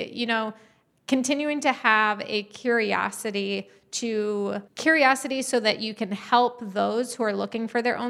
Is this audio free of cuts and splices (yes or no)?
no